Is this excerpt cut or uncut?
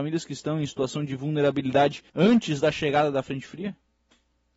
cut